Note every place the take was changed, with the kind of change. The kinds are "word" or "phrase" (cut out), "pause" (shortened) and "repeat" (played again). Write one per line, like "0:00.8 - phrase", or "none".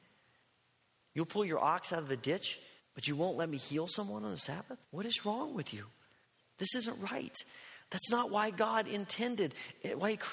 0:02.8 - pause
0:04.8 - pause
0:06.2 - pause

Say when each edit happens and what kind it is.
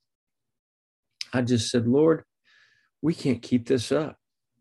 none

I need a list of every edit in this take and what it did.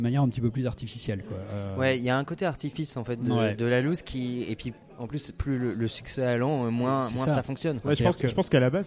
none

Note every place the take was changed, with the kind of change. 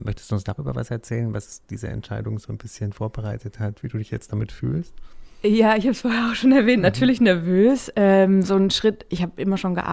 none

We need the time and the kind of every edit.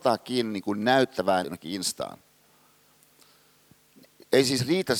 0:01.4 - word

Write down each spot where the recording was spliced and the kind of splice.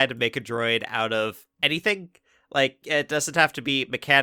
0:01.5 - pause

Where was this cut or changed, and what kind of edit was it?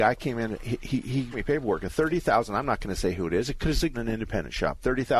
0:01.3 - word
0:03.9 - phrase

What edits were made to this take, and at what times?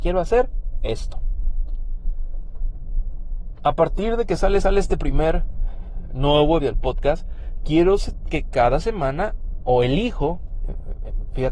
0:04.6 - repeat
0:06.6 - word
0:09.6 - word

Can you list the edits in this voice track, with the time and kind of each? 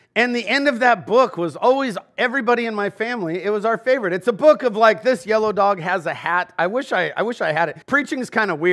0:07.8 - pause

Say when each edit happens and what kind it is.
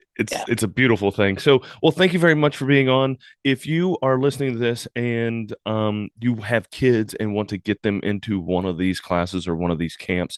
none

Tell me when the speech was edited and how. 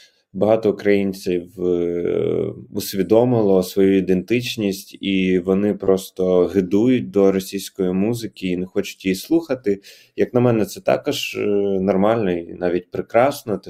none

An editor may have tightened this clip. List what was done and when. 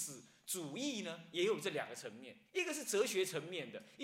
0:02.5 - pause

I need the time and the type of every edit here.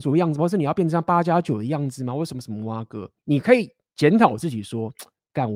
0:03.2 - pause

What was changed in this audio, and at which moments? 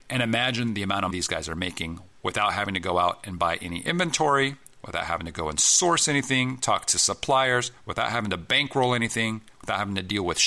0:01.1 - word

